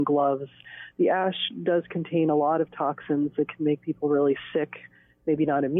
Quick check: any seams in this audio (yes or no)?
no